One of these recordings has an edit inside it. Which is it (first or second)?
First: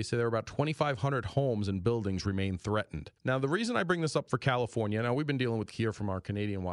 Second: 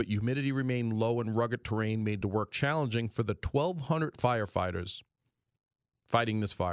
first